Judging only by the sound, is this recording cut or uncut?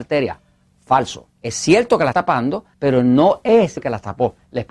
cut